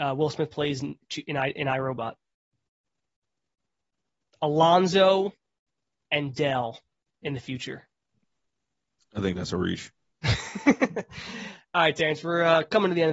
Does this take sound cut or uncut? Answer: uncut